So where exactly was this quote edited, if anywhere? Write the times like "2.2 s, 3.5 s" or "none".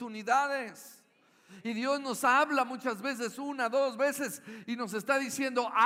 none